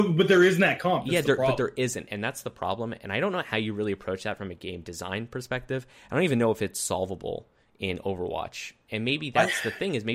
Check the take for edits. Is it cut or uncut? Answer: uncut